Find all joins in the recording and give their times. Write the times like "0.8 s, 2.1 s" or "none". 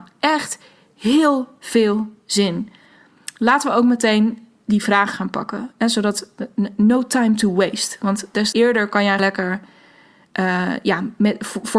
5.1 s, 8.5 s, 9.2 s

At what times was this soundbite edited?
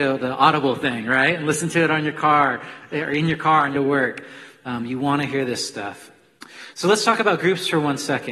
3.7 s

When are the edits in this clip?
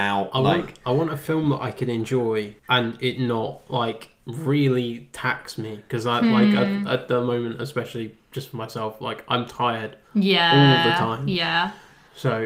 2.6 s

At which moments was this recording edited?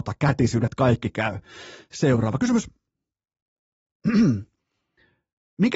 none

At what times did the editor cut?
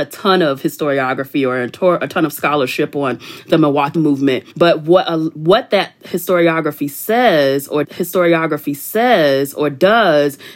3.9 s, 4.5 s, 7.8 s

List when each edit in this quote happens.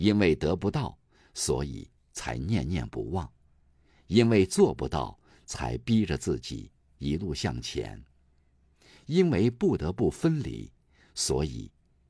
none

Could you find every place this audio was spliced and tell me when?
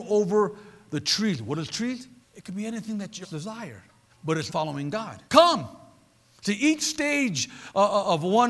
2.2 s, 3.2 s, 4.1 s, 4.5 s, 5.3 s

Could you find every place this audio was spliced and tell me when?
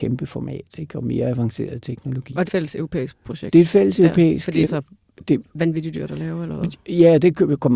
2.5 s, 4.6 s

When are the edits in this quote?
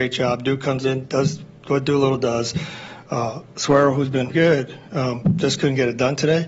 4.3 s

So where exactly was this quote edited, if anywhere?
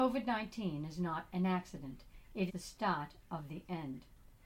2.5 s

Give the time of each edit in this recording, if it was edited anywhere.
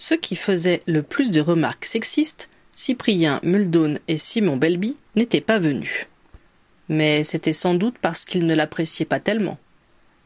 5.1 s

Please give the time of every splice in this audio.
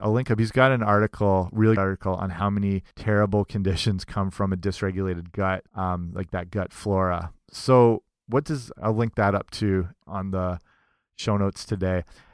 1.8 s, 2.9 s, 5.7 s, 10.0 s

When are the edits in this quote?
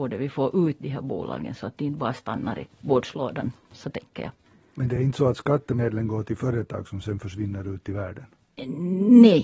none

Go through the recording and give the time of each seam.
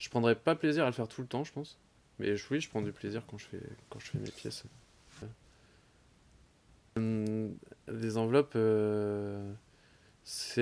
none

